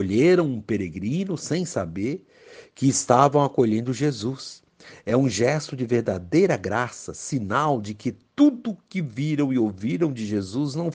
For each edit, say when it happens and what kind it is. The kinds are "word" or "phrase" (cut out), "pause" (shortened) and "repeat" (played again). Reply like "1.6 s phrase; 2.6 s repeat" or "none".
none